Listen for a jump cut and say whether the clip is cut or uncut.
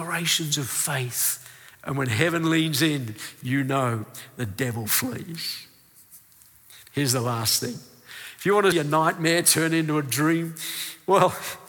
cut